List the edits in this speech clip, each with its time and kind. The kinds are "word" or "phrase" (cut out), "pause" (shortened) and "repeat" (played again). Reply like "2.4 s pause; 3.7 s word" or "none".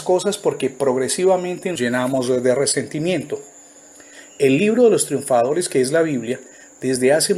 1.7 s word